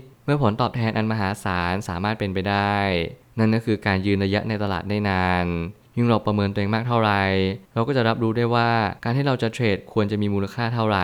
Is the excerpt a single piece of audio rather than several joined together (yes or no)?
no